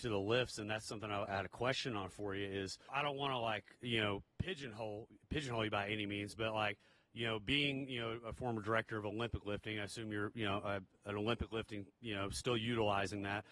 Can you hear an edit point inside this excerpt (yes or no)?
yes